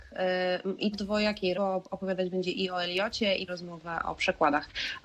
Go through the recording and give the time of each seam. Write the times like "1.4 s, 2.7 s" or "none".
0.9 s, 1.5 s, 3.5 s